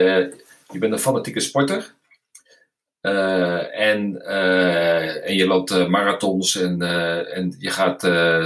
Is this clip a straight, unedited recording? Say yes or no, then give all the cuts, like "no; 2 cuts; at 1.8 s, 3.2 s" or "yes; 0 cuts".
yes; 0 cuts